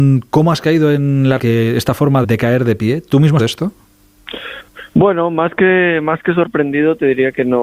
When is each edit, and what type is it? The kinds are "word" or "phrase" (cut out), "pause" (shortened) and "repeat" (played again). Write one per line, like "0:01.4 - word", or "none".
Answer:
0:01.4 - phrase
0:02.2 - word
0:03.4 - phrase
0:04.9 - pause